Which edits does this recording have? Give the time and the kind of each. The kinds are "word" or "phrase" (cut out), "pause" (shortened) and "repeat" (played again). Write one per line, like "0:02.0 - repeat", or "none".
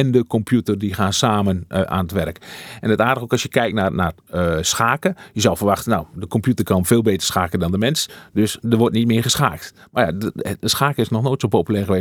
none